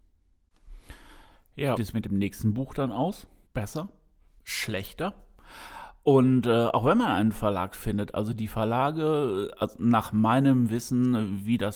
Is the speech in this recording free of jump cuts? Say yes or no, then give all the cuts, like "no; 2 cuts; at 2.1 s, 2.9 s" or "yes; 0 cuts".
no; 2 cuts; at 1.8 s, 3.5 s